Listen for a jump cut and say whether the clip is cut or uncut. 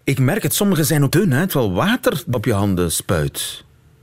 cut